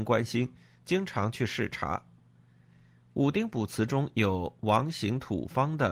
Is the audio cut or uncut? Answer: uncut